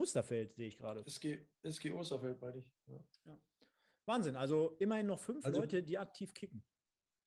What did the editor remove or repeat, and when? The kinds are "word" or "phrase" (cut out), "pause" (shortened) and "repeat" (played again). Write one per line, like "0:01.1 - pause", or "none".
none